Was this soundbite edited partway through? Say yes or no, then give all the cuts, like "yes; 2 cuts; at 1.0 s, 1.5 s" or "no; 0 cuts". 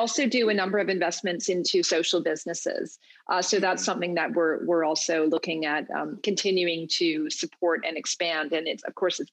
no; 0 cuts